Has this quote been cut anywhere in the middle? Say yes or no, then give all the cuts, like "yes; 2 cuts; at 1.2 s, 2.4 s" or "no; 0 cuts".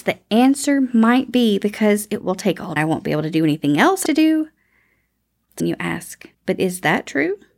yes; 4 cuts; at 2.8 s, 4.1 s, 5.6 s, 6.3 s